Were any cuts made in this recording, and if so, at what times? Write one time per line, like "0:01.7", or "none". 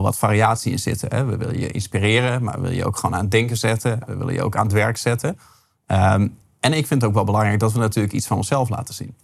none